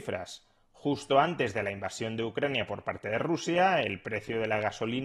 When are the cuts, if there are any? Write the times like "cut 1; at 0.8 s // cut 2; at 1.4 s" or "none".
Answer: none